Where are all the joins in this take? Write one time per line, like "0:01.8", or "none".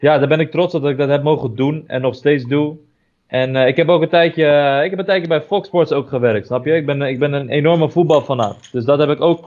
none